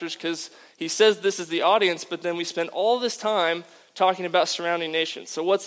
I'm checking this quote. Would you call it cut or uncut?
uncut